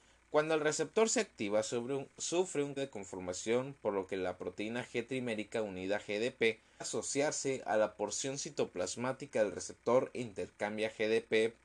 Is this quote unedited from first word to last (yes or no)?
no